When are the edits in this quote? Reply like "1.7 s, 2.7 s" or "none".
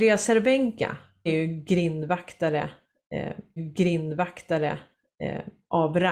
1.3 s, 3.6 s